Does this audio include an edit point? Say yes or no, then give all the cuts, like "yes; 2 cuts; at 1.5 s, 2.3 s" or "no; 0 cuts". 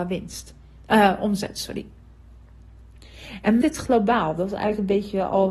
yes; 1 cut; at 3.6 s